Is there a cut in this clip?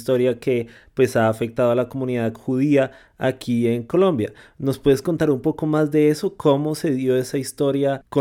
no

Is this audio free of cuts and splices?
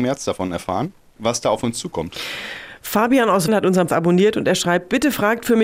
no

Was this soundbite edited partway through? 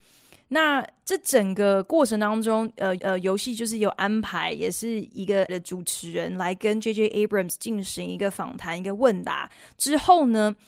yes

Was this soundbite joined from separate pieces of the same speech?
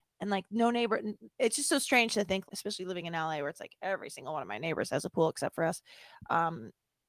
yes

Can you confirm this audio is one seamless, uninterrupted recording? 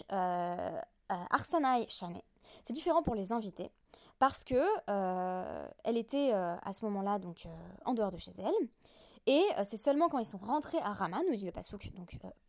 yes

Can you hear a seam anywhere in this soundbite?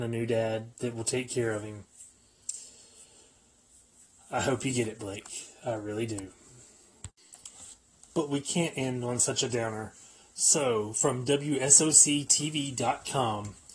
no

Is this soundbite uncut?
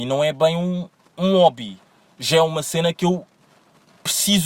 yes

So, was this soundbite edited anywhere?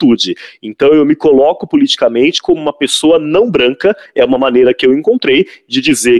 no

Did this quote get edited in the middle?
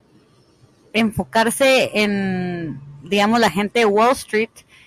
no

